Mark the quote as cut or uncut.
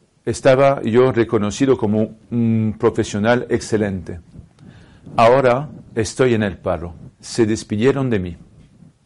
cut